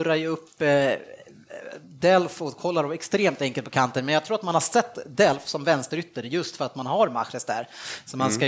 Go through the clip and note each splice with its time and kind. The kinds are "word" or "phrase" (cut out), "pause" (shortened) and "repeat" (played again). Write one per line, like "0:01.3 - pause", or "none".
none